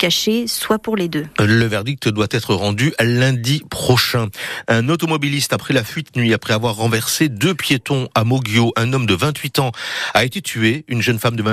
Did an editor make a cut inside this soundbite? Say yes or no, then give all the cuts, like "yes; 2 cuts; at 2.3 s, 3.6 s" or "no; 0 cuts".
yes; 1 cut; at 6.1 s